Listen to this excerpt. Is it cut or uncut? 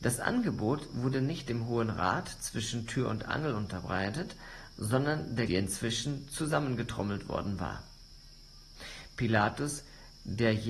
cut